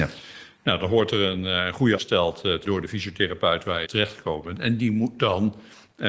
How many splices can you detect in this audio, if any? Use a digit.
3